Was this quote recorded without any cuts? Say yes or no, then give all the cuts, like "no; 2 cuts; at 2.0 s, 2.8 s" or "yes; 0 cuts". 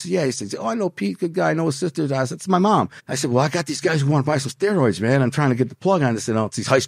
no; 1 cut; at 3.0 s